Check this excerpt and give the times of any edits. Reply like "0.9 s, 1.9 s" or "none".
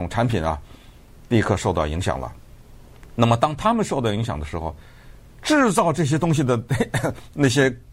none